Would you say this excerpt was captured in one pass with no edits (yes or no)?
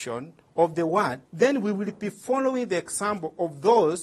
no